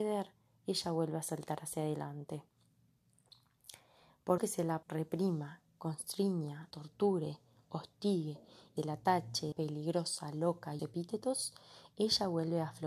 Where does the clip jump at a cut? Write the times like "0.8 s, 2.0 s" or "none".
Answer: 4.4 s, 4.8 s, 6.7 s, 8.8 s, 9.5 s, 10.8 s